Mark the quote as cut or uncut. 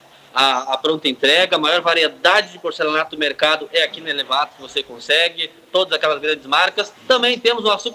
cut